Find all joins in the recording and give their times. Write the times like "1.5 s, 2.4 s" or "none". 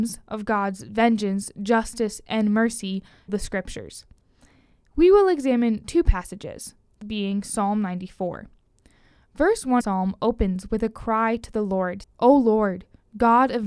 3.3 s, 7.0 s, 9.8 s, 12.0 s